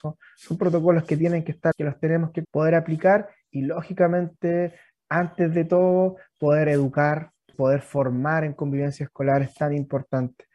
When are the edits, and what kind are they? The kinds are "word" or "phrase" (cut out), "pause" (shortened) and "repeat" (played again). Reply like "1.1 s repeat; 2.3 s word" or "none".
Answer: 1.7 s word; 2.4 s word; 7.5 s word